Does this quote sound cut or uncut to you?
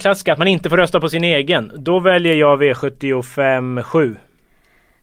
uncut